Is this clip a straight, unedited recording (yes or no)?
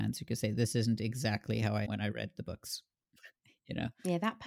no